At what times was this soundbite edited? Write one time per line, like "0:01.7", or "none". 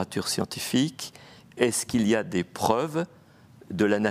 none